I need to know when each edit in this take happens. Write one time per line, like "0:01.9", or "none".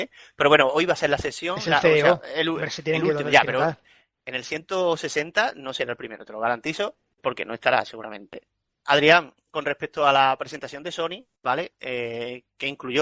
0:07.2